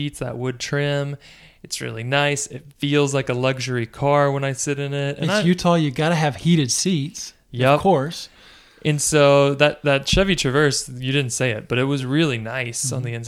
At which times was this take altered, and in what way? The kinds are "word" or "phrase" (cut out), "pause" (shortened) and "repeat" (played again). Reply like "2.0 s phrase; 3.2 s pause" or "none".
none